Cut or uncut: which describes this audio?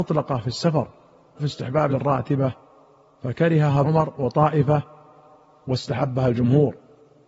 cut